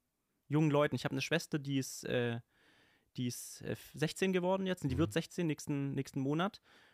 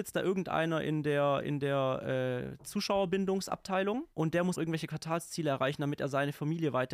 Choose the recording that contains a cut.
second; 2 cuts; at 4.1 s, 4.5 s

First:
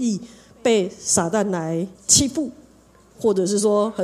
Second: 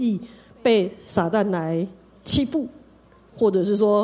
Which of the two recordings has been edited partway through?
first; 1 cut; at 1.9 s

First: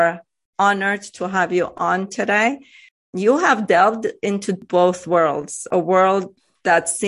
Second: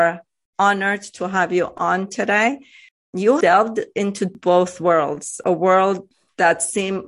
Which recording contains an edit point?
second; 1 cut; at 3.4 s

